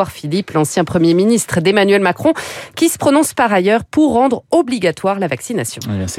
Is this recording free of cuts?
yes; 0 cuts

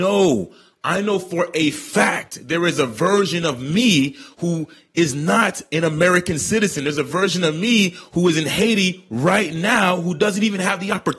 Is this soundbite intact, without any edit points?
yes; 0 cuts

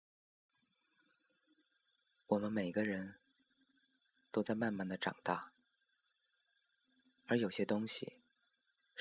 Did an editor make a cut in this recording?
no; 0 cuts

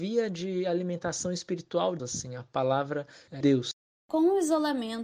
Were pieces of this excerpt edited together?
yes; 2 cuts; at 2.0 s, 3.4 s

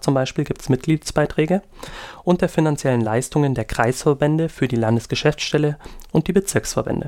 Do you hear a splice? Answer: no; 0 cuts

